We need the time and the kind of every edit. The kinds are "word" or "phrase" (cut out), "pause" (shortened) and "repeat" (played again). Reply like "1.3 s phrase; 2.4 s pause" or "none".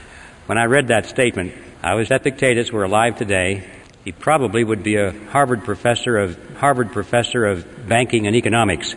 1.7 s pause; 2.1 s phrase; 3.8 s pause; 6.5 s repeat